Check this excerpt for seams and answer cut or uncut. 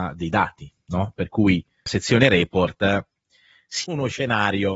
cut